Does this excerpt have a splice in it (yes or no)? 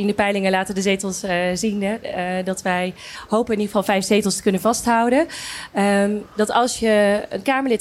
no